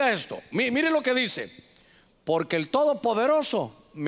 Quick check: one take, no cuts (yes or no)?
yes